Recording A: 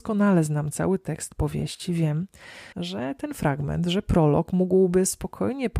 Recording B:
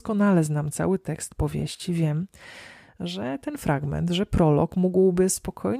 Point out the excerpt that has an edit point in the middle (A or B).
A